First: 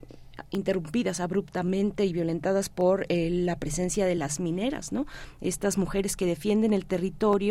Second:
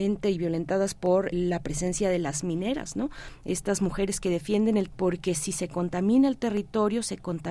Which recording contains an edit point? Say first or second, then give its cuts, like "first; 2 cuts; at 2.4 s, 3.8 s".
second; 2 cuts; at 1.3 s, 4.9 s